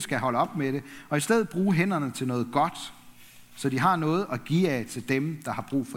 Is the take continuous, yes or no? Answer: yes